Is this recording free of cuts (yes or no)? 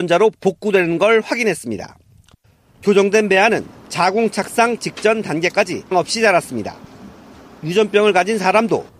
no